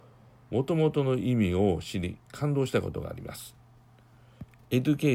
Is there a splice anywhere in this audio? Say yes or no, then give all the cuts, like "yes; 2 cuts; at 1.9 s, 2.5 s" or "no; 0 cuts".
yes; 1 cut; at 2.2 s